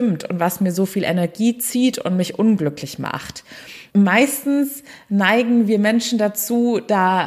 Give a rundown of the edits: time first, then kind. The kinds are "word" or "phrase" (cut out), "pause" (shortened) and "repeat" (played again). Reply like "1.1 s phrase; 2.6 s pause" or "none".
3.9 s pause